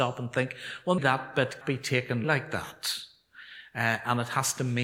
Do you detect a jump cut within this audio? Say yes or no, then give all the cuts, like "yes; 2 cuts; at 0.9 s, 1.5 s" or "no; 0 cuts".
yes; 3 cuts; at 1.0 s, 1.6 s, 2.2 s